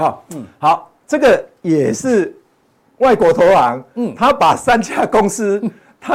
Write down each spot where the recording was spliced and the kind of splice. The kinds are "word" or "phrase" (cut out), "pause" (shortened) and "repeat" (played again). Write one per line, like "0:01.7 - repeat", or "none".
none